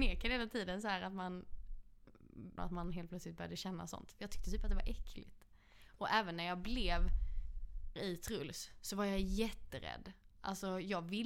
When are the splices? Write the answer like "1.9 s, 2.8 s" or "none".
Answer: 2.6 s, 8.0 s